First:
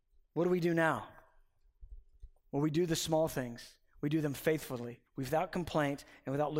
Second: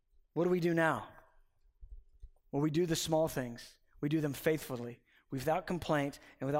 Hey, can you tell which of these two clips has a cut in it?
first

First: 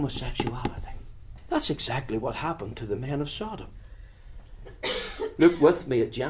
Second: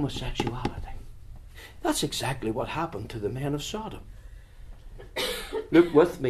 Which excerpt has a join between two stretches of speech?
first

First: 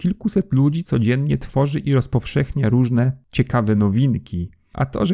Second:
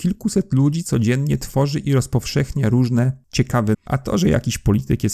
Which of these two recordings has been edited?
second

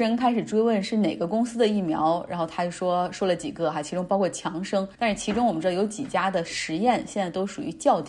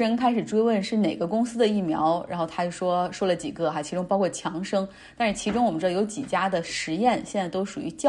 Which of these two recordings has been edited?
first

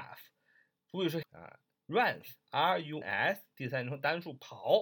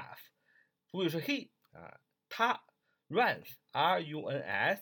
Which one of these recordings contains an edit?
first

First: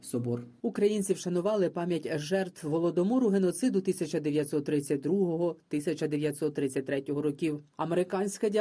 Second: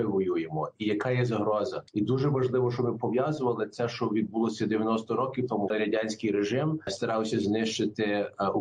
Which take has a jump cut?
second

